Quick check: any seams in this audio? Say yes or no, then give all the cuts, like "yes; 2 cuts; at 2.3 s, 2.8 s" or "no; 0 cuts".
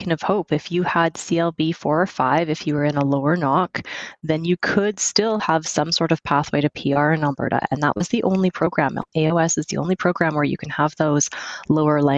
no; 0 cuts